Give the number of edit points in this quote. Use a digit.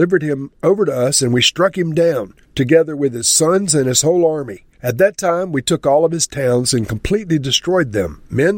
2